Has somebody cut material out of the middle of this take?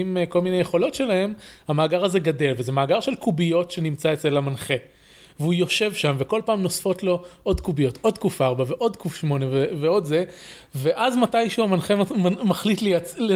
no; 0 cuts

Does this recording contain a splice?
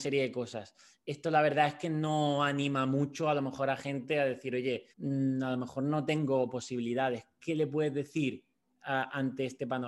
yes; 1 cut; at 4.9 s

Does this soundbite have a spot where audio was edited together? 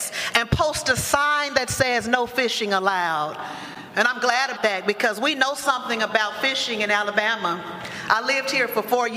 yes; 1 cut; at 4.6 s

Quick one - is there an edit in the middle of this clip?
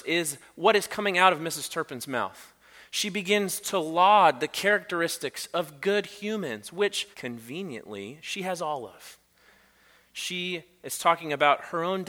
yes; 1 cut; at 7.1 s

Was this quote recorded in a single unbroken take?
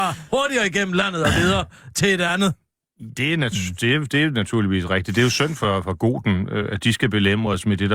yes; 0 cuts

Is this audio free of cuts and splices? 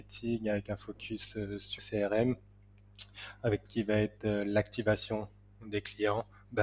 no; 2 cuts; at 1.8 s, 3.7 s

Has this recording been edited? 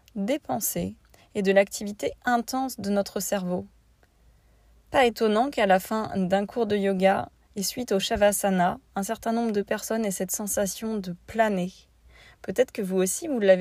no; 0 cuts

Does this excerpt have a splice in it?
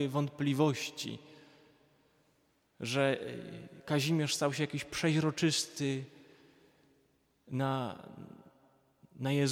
no; 0 cuts

